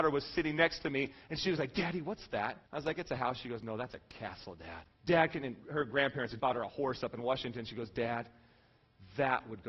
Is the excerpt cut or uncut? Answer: cut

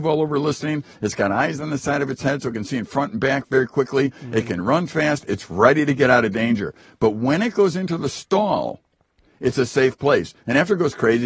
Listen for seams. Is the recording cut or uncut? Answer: uncut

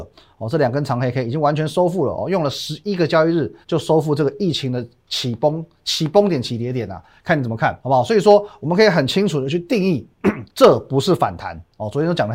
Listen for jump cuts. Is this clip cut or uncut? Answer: cut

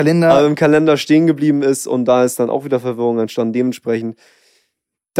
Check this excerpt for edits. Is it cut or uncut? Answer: uncut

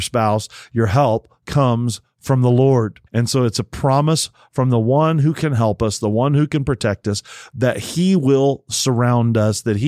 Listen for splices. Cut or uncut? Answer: cut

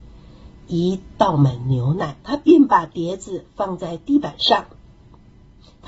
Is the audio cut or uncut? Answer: cut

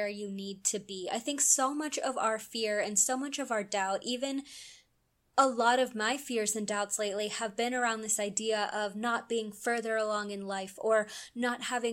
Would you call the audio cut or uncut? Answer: uncut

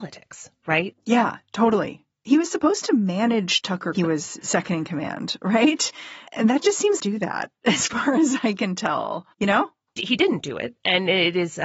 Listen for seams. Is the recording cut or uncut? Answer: cut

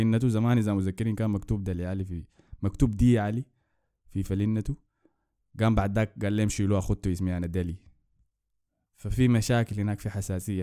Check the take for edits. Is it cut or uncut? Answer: uncut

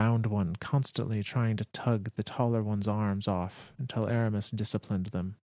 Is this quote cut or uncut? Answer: uncut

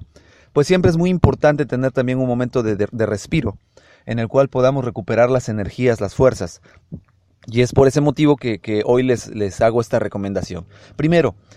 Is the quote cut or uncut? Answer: uncut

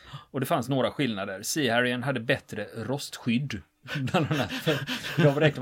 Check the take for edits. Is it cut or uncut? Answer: uncut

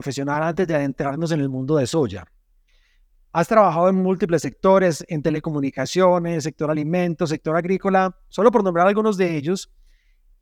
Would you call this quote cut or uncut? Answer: uncut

